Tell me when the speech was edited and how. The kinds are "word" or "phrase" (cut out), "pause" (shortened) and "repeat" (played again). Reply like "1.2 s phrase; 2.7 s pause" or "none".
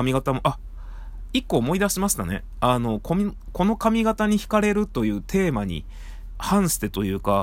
6.3 s phrase